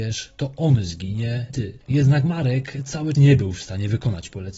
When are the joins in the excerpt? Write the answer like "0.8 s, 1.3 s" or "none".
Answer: 1.5 s, 1.8 s, 3.1 s